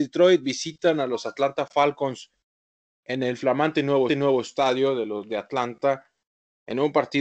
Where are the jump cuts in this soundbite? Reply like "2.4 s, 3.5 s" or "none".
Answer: 4.1 s